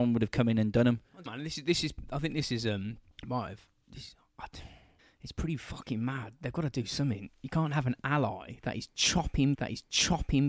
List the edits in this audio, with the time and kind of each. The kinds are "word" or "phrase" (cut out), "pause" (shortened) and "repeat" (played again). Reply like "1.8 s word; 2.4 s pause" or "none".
1.3 s word; 3.1 s pause; 5.0 s pause; 9.5 s repeat